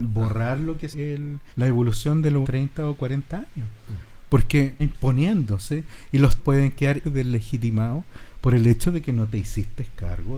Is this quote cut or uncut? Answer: cut